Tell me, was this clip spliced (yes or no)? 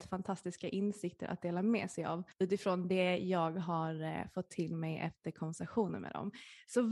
yes